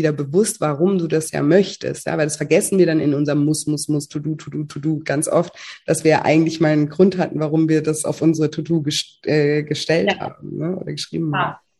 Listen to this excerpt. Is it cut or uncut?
uncut